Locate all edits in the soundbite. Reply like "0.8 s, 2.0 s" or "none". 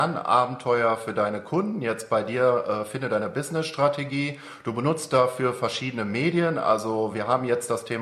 none